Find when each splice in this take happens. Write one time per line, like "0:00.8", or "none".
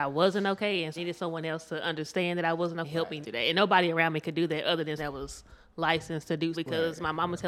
0:01.0
0:02.8
0:03.2
0:05.0
0:06.5